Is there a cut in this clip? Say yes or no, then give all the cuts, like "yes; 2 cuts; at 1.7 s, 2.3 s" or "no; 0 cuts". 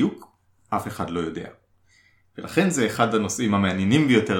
no; 0 cuts